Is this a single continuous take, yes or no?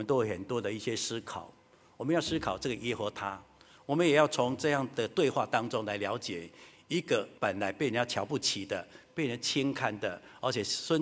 no